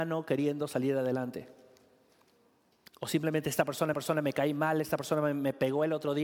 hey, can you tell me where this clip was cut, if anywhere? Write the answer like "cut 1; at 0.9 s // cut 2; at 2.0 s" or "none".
cut 1; at 3.9 s

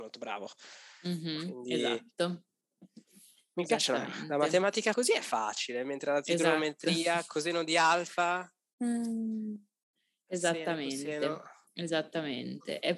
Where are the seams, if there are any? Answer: cut 1; at 4.9 s

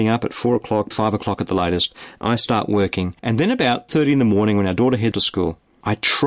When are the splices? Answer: cut 1; at 0.9 s // cut 2; at 3.2 s // cut 3; at 3.9 s // cut 4; at 5.1 s

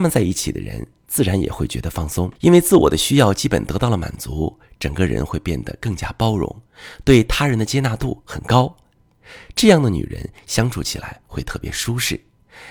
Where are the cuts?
cut 1; at 2.4 s

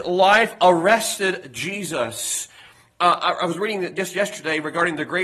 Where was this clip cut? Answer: none

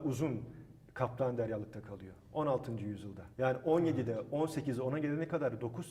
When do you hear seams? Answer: cut 1; at 3.3 s

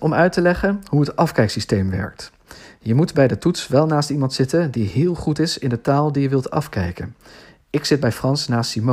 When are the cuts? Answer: none

